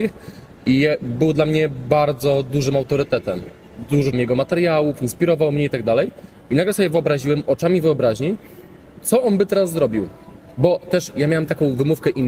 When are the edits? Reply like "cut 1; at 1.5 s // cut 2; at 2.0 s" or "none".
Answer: cut 1; at 4.1 s